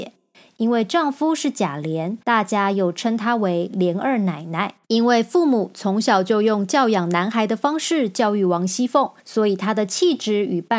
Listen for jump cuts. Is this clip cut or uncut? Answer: cut